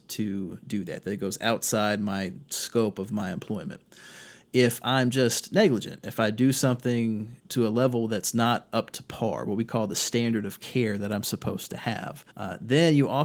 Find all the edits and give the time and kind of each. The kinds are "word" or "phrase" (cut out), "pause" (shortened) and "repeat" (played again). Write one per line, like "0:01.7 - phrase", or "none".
0:12.3 - pause